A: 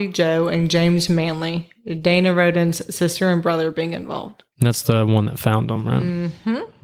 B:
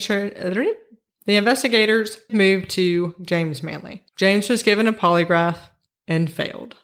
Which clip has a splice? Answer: B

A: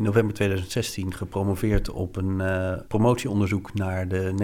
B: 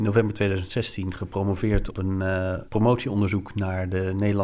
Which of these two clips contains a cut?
B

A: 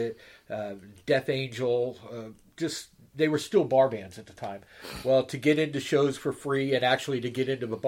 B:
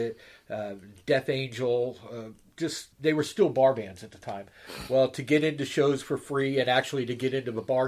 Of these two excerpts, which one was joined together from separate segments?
B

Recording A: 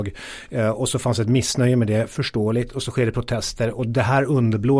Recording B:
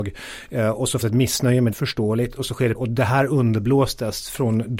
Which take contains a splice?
B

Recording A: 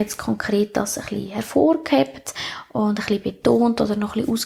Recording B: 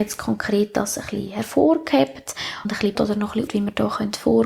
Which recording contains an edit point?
B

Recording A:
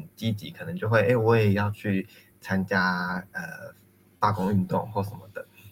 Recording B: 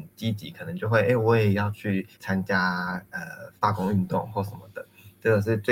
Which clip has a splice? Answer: B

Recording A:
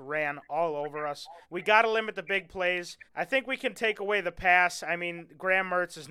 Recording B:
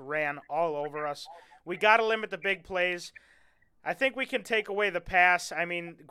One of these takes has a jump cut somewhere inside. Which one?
A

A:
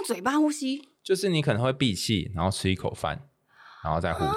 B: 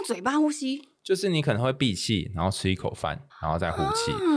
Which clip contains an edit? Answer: B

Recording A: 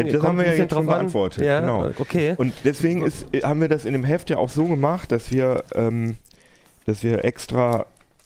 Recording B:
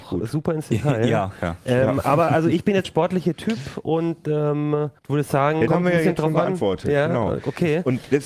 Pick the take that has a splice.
B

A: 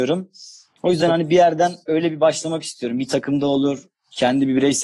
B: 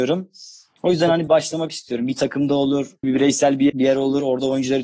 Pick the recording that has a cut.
B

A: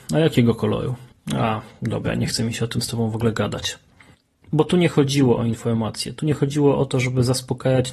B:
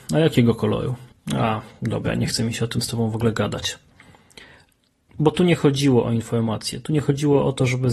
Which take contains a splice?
A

